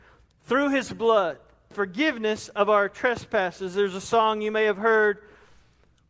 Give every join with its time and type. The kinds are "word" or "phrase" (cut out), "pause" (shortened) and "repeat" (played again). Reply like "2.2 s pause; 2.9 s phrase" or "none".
1.7 s word